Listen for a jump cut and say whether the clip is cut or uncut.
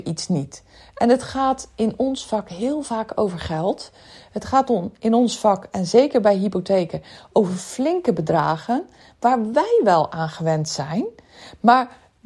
uncut